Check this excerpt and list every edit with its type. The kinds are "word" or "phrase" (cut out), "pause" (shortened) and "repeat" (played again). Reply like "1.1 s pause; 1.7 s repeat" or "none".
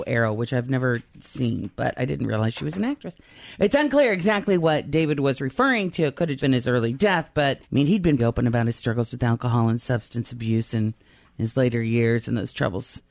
6.4 s word; 7.6 s pause; 8.2 s word